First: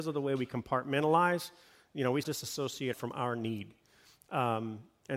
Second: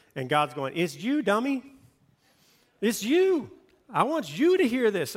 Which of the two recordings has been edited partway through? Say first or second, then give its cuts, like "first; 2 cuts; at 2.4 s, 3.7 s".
first; 2 cuts; at 2.2 s, 2.9 s